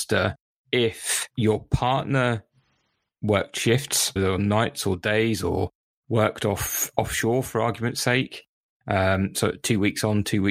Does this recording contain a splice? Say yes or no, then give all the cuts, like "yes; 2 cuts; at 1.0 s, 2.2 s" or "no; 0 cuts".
yes; 1 cut; at 4.2 s